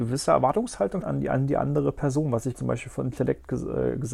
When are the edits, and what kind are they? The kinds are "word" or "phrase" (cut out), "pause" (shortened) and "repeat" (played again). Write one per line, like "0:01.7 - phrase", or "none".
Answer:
0:01.0 - word
0:02.5 - word